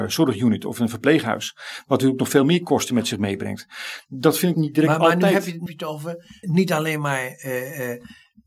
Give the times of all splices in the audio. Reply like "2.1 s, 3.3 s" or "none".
4.5 s, 5.7 s, 6.4 s